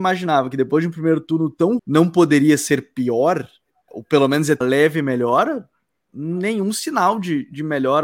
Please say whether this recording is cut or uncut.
cut